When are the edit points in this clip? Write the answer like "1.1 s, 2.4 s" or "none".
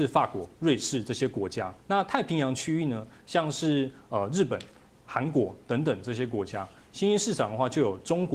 1.8 s